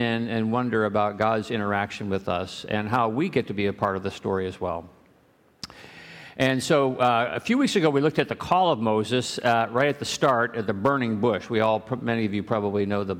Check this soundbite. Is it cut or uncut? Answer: uncut